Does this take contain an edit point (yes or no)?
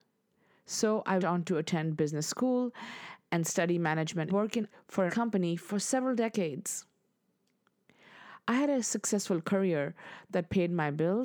yes